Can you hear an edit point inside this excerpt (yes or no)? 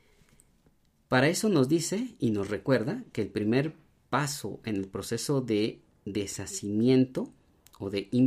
no